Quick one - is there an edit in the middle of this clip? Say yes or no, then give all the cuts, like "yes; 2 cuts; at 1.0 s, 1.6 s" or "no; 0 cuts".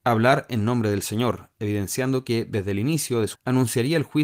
yes; 1 cut; at 3.3 s